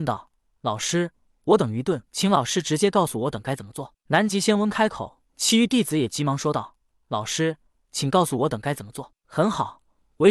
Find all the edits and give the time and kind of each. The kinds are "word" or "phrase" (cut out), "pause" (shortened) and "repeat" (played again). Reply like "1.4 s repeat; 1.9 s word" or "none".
2.1 s pause; 5.3 s pause